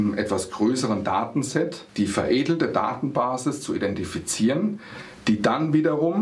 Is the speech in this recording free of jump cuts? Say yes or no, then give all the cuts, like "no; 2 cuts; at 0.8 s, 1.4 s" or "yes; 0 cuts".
no; 1 cut; at 1.9 s